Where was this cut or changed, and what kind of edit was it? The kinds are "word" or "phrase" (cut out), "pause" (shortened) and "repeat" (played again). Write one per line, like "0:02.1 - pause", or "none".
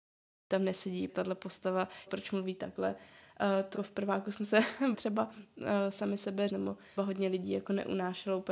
0:01.1 - word
0:02.1 - word
0:03.7 - word
0:04.9 - word
0:06.5 - word
0:07.0 - word